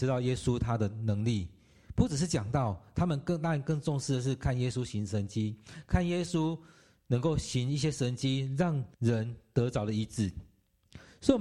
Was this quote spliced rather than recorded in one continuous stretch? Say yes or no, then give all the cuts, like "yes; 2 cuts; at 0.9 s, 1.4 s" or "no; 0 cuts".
yes; 1 cut; at 8.9 s